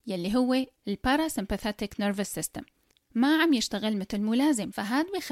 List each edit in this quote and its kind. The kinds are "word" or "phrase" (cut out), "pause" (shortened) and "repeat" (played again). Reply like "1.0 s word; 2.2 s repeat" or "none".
none

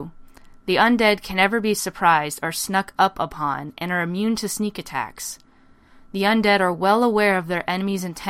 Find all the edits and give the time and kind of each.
none

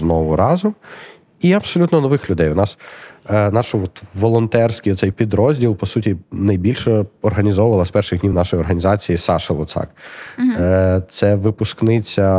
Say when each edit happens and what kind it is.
none

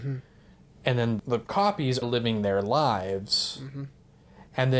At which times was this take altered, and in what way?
1.2 s word; 2.0 s word

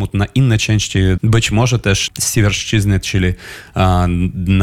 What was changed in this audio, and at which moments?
1.2 s word; 2.1 s word

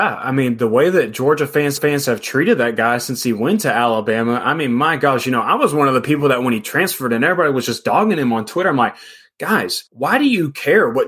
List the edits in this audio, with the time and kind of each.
1.8 s repeat; 9.9 s pause

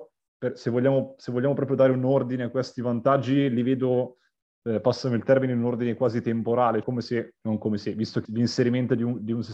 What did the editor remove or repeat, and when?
6.8 s word; 7.4 s word; 8.2 s word

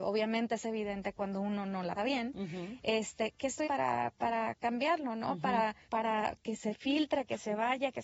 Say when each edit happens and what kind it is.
2.0 s word; 3.6 s word; 5.8 s word; 6.4 s word

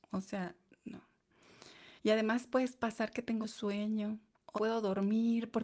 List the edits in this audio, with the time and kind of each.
2.0 s pause; 3.4 s word; 4.6 s phrase

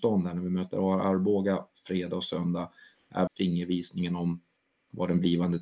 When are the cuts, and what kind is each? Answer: 3.3 s phrase

